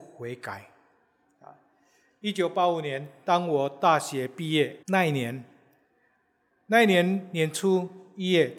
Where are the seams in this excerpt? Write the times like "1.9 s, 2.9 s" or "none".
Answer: 4.8 s